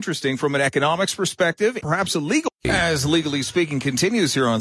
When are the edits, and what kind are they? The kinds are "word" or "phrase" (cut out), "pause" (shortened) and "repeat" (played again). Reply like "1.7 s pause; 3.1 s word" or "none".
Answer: 1.8 s word